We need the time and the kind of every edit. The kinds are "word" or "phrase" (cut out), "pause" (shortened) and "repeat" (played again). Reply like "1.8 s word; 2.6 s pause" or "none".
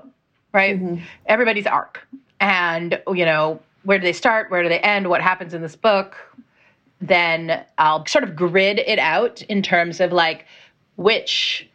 none